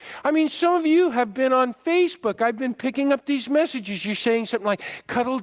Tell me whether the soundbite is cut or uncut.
uncut